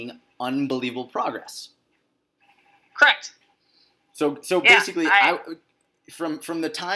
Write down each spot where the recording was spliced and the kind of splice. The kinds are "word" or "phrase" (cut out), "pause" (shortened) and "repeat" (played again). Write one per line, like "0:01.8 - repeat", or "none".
0:03.5 - pause